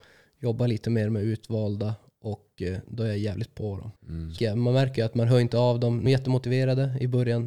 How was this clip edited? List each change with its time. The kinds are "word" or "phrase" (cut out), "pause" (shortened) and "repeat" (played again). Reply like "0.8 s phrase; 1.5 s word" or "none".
4.0 s pause; 4.4 s word; 6.1 s phrase